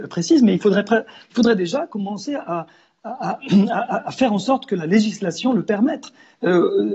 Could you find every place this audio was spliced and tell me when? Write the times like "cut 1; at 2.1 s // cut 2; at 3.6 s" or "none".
none